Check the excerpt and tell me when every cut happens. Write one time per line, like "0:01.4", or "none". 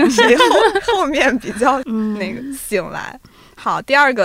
none

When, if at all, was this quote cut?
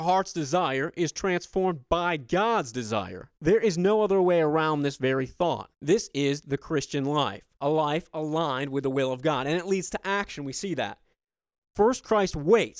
0:03.4
0:05.7
0:07.6

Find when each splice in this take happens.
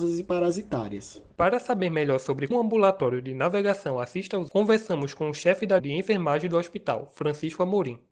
0:02.5
0:04.5
0:05.8

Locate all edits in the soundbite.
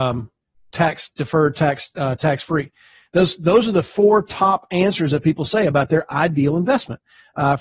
none

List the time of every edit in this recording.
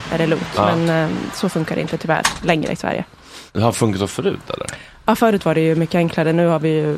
0:03.5

